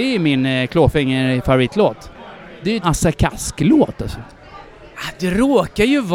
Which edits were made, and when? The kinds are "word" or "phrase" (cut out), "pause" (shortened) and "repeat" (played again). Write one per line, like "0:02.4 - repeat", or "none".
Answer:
0:02.8 - word